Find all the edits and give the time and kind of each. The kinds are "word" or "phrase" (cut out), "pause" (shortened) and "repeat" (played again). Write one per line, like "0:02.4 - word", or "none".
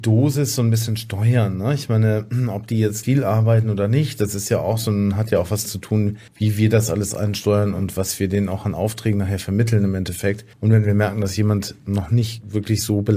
0:03.0 - phrase
0:05.6 - word
0:06.3 - pause
0:10.5 - pause